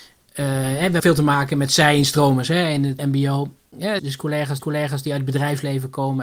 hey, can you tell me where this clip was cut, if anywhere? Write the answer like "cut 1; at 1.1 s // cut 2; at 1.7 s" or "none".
cut 1; at 1.0 s // cut 2; at 3.0 s // cut 3; at 4.0 s // cut 4; at 4.6 s